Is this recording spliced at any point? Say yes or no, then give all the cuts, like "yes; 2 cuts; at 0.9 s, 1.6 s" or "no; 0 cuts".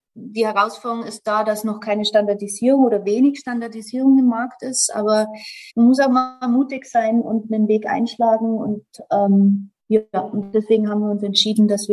yes; 2 cuts; at 5.7 s, 9.8 s